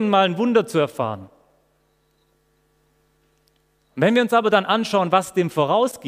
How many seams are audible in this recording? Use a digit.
0